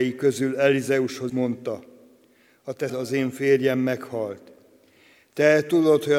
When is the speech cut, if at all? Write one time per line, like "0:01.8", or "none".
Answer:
0:01.3
0:02.9